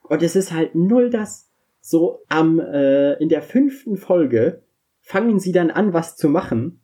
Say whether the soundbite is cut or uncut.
cut